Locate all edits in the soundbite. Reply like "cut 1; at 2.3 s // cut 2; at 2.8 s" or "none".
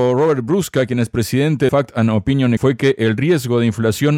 cut 1; at 1.7 s // cut 2; at 2.6 s